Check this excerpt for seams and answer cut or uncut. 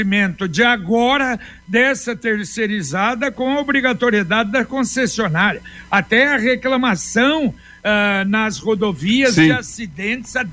uncut